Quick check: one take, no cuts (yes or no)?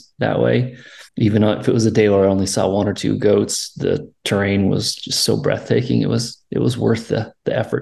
no